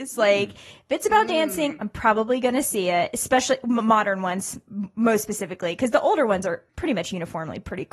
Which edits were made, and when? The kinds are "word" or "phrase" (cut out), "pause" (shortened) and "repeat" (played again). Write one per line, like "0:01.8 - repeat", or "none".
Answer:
0:06.7 - pause